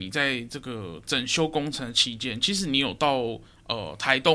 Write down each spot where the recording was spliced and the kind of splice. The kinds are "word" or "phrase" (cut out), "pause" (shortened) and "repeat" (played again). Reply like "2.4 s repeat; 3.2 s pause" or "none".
3.4 s pause

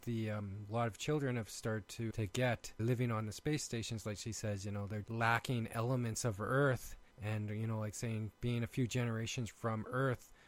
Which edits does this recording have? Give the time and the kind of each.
2.1 s word; 2.8 s word; 5.0 s word; 7.1 s pause; 9.5 s word

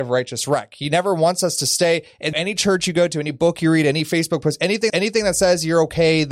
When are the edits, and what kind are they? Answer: 2.3 s word; 4.9 s repeat

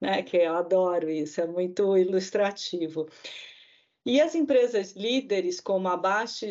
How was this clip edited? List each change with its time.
none

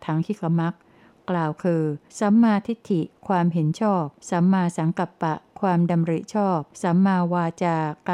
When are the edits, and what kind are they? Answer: 2.1 s pause; 4.2 s pause; 6.7 s pause

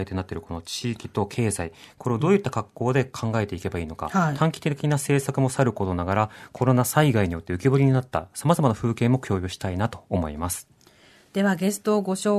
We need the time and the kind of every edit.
none

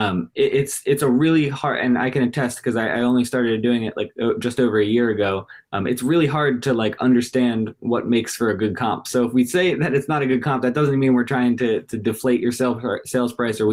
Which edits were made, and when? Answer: none

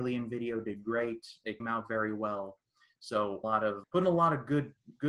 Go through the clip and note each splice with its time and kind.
1.6 s word; 3.4 s phrase; 3.8 s word

